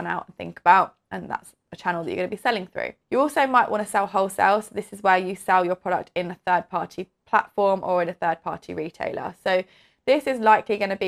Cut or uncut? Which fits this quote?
cut